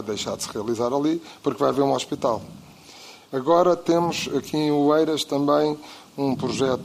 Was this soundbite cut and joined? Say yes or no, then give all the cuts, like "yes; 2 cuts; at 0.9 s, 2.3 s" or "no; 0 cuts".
no; 0 cuts